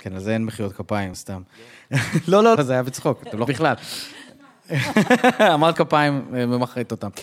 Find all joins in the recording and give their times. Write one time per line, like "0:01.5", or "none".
0:01.1
0:02.6
0:03.5
0:05.7